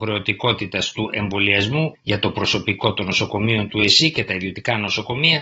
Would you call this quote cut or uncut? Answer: uncut